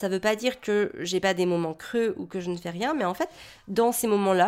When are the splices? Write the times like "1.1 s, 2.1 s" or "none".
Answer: none

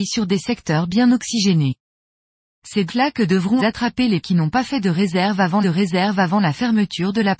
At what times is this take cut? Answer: 2.9 s, 3.6 s, 4.2 s, 5.6 s

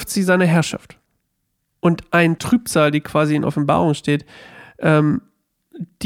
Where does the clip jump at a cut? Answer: 2.4 s

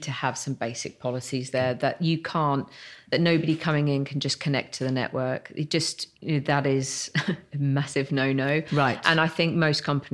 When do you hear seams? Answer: 6.1 s

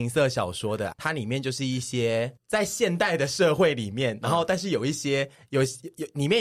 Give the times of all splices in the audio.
0.9 s, 2.4 s, 5.3 s

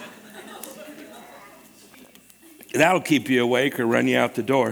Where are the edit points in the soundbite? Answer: none

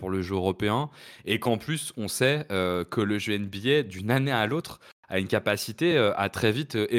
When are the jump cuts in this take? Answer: none

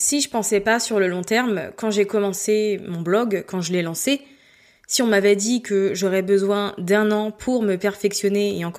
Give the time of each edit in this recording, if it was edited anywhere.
none

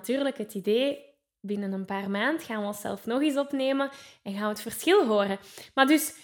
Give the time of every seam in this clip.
none

